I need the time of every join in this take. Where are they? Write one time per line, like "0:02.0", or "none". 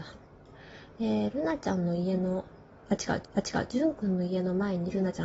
0:03.2